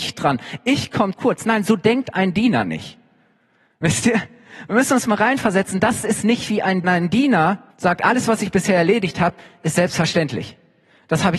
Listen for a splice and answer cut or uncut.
cut